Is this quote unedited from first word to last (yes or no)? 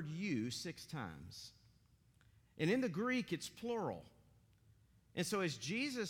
yes